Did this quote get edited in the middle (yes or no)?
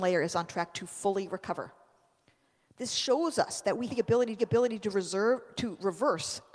yes